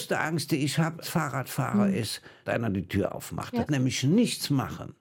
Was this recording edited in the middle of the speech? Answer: yes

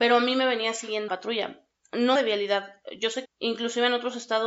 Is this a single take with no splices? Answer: no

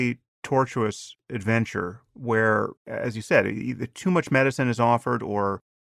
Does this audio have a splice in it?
yes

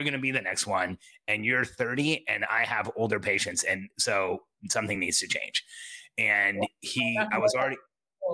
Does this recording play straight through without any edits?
yes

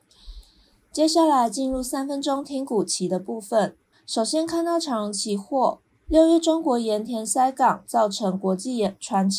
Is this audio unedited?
no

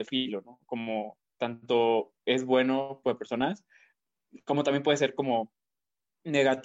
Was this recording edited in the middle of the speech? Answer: yes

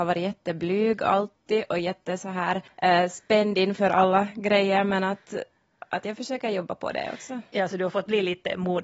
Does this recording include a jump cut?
yes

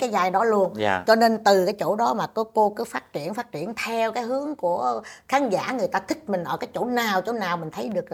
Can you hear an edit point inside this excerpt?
no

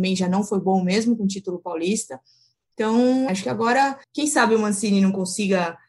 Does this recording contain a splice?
yes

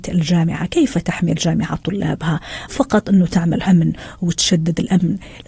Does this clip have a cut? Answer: yes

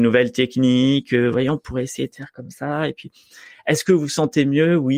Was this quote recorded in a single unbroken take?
yes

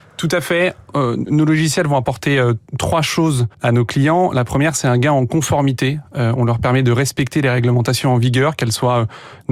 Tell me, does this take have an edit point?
yes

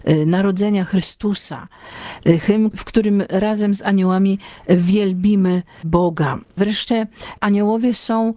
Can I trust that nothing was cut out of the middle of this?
yes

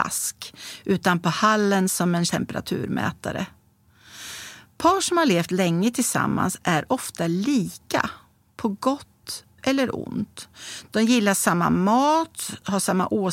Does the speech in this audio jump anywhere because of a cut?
yes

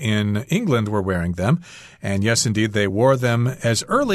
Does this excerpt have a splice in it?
no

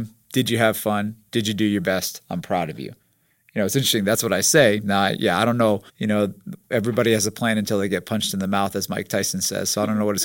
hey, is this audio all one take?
no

